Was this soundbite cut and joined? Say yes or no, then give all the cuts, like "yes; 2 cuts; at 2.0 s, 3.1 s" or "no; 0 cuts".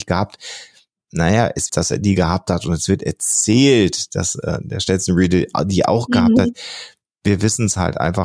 yes; 1 cut; at 1.7 s